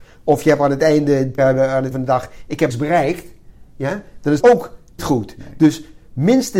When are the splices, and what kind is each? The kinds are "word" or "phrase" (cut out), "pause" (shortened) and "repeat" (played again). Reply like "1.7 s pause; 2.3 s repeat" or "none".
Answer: 1.4 s word; 1.9 s word; 2.7 s word; 4.4 s word; 5.0 s word